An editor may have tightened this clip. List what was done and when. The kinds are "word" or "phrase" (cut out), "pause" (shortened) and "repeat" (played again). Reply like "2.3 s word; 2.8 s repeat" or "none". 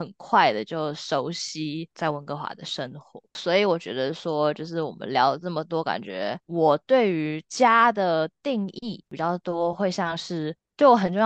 3.3 s pause